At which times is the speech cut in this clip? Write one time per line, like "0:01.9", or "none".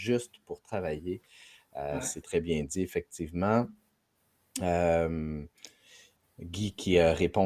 0:02.2